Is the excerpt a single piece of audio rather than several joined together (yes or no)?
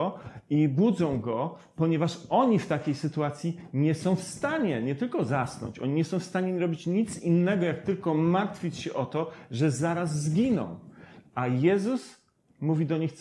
yes